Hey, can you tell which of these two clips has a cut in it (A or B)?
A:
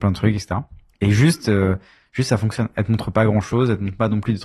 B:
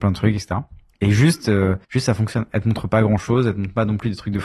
B